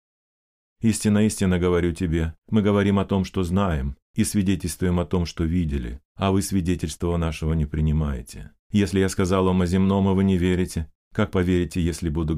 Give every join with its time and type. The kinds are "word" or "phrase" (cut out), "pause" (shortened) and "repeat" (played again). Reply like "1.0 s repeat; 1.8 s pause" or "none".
2.4 s pause; 4.0 s pause; 6.1 s pause; 8.6 s pause; 11.0 s pause